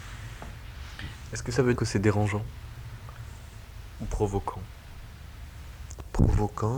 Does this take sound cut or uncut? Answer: cut